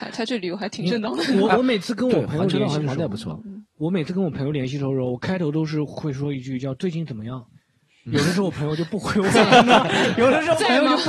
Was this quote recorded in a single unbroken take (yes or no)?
yes